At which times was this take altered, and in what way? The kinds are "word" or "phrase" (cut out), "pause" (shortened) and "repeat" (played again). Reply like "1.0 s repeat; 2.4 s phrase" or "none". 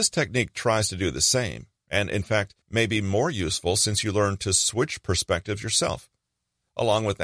2.6 s pause; 6.2 s pause